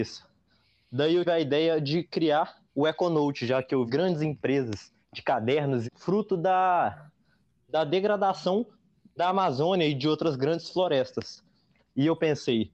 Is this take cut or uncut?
cut